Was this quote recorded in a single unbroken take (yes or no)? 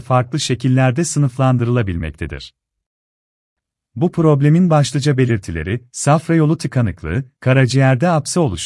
yes